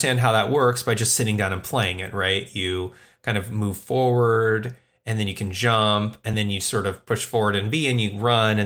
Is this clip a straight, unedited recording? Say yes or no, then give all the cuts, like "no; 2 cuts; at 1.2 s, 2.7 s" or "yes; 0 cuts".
yes; 0 cuts